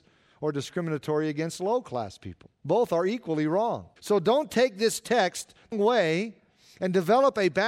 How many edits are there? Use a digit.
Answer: 3